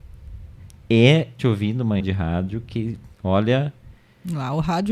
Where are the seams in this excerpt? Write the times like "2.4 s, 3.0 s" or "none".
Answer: 1.4 s, 2.0 s, 3.1 s

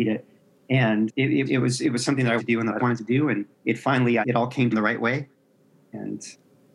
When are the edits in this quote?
1.5 s, 2.4 s, 2.8 s, 4.2 s, 4.7 s

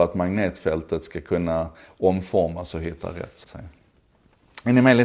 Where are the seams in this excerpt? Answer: 3.4 s

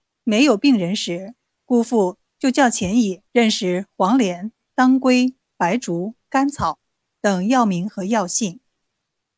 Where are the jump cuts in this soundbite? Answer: 3.3 s

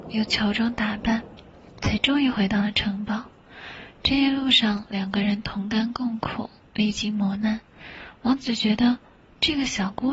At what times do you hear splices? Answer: none

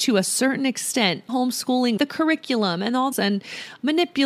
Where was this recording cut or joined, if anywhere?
1.3 s, 2.0 s, 3.1 s

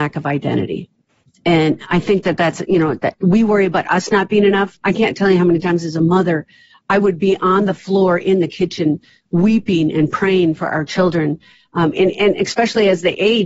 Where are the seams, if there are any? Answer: none

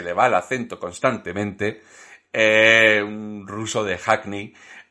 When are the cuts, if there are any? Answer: none

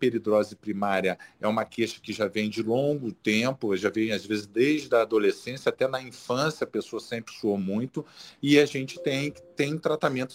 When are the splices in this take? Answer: none

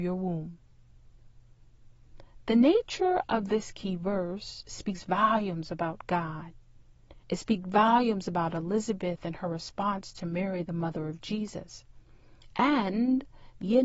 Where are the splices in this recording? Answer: 7.2 s

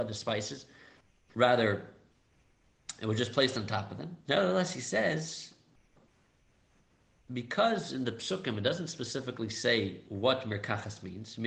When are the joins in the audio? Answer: 1.0 s, 4.2 s

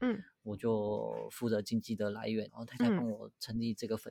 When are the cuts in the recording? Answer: 2.5 s

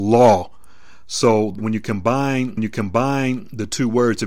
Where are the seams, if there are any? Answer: 1.6 s, 2.6 s

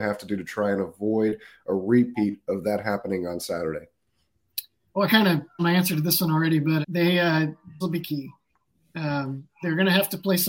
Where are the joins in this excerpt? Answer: 5.6 s, 6.8 s, 7.8 s

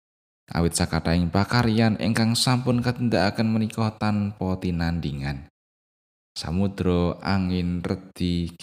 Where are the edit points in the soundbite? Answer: none

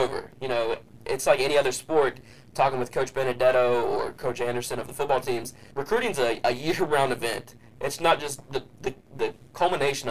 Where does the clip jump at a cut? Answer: 5.7 s

